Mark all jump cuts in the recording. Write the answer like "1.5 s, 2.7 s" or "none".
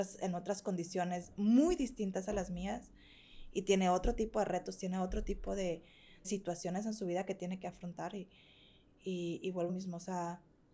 6.2 s, 9.7 s